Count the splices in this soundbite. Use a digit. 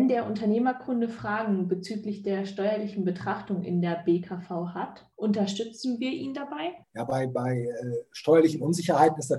2